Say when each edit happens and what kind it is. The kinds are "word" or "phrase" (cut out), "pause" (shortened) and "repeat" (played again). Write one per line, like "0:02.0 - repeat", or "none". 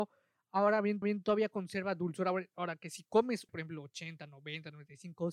0:01.0 - repeat
0:03.5 - phrase